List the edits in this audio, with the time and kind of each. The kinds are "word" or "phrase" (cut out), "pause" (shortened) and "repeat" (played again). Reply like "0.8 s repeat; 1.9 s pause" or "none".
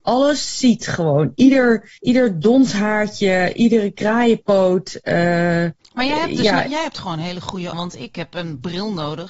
2.0 s pause; 5.8 s pause; 7.7 s word